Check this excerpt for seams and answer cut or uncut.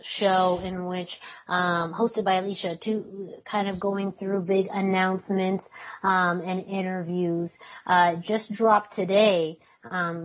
uncut